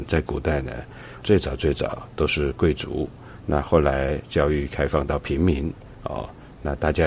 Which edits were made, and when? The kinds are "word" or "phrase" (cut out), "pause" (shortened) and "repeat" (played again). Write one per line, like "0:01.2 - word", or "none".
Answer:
0:01.2 - word